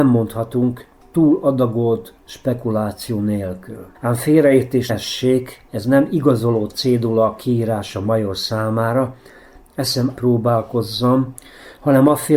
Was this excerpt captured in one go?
no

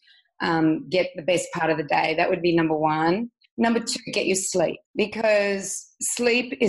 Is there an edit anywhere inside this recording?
yes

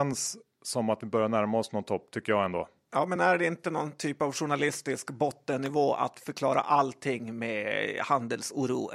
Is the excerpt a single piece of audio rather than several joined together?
yes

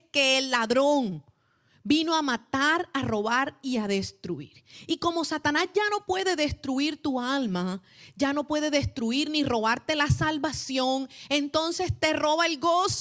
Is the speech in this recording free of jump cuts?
yes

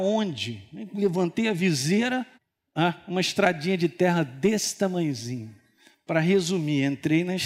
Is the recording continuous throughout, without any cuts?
no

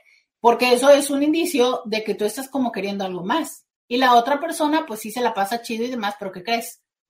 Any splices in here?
yes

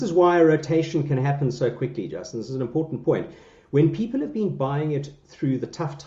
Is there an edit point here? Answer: no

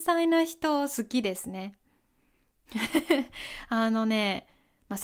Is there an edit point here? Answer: no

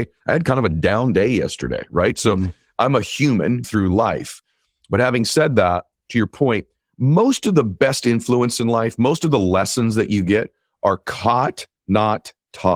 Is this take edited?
yes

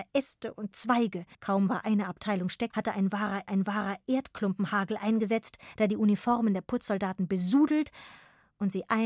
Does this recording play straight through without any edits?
no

